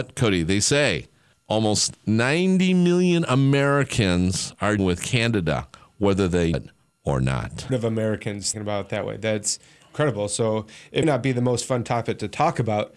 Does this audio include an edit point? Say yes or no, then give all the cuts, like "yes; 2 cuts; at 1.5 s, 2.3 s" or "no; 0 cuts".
yes; 6 cuts; at 1.3 s, 4.8 s, 6.5 s, 7.7 s, 8.5 s, 11.0 s